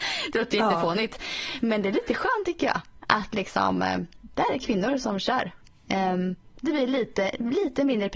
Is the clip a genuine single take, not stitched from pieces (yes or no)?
yes